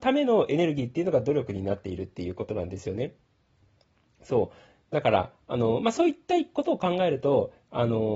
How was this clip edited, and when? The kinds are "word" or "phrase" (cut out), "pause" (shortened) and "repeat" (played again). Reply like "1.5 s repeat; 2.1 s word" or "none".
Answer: none